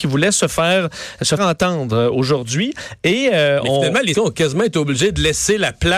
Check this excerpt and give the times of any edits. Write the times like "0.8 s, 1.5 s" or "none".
1.4 s, 4.1 s